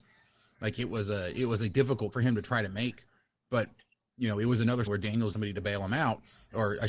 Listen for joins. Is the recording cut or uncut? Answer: cut